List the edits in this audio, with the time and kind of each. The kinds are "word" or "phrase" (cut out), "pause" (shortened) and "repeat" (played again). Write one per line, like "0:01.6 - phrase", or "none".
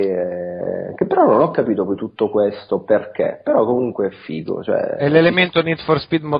none